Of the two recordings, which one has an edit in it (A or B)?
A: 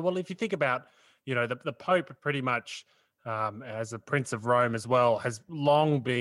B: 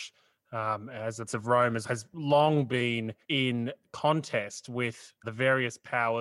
B